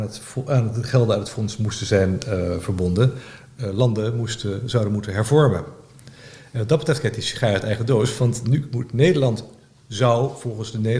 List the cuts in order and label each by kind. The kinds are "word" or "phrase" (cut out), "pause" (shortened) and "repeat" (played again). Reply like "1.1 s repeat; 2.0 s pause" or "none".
none

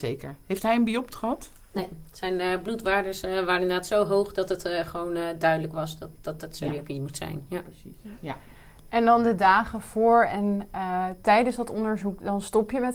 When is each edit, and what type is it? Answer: none

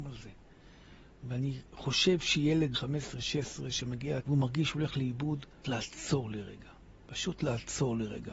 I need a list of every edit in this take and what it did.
2.7 s word; 4.2 s word; 5.6 s word

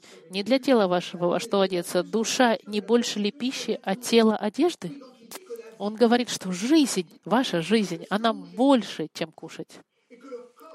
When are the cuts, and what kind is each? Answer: 7.2 s pause

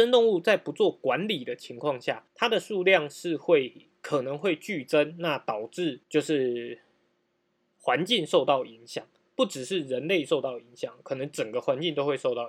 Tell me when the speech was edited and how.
2.3 s pause; 6.0 s pause

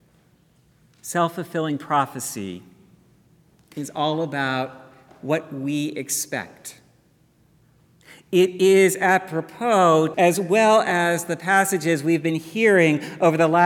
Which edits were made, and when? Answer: 10.1 s phrase

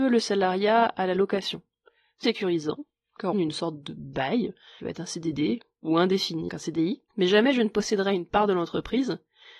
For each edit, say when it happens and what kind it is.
2.2 s word; 3.3 s phrase; 4.8 s phrase; 6.5 s word; 7.1 s pause

